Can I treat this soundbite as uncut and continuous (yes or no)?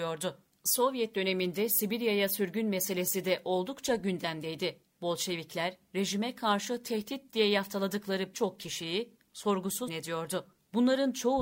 no